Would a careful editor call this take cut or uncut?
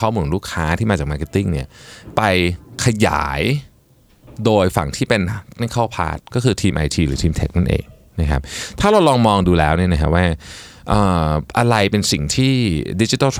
cut